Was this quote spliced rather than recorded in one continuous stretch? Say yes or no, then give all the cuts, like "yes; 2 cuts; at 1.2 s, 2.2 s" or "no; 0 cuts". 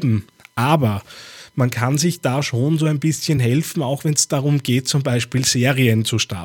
no; 0 cuts